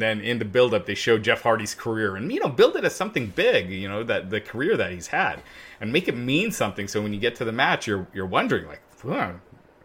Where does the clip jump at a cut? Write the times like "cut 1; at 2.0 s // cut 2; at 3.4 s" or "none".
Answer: none